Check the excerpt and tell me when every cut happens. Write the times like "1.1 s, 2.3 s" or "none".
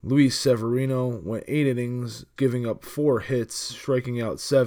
2.4 s